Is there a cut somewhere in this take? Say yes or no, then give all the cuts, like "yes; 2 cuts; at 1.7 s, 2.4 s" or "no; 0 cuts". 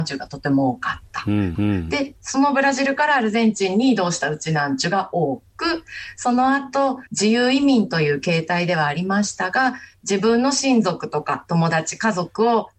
yes; 2 cuts; at 1.6 s, 7.1 s